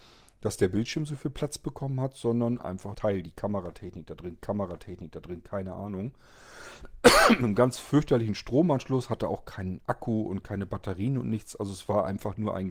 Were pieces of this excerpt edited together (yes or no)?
yes